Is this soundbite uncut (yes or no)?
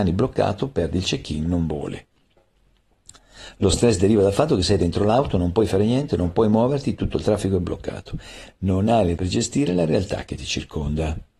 no